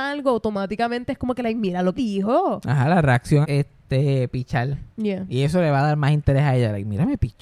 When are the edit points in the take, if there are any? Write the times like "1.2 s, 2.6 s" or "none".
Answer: 2.0 s, 3.4 s, 4.9 s